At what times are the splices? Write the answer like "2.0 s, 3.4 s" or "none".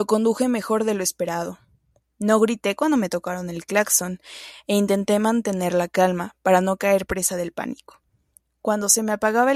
none